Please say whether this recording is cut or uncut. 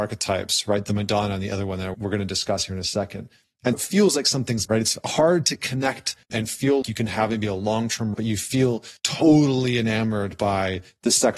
cut